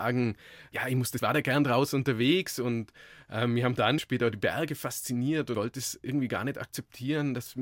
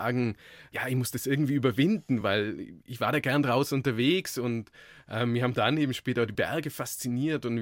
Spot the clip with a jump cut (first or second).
first